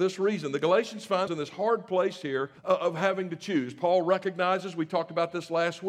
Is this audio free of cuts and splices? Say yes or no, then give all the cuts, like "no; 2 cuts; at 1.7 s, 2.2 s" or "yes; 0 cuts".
no; 2 cuts; at 1.3 s, 2.6 s